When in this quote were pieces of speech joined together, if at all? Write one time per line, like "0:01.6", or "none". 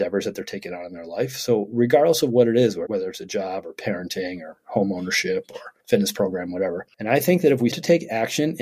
0:02.8
0:05.8
0:07.7